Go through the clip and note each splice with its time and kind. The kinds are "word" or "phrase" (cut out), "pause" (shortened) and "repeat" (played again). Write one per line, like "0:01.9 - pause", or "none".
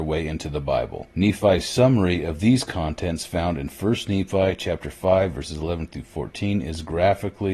0:01.1 - pause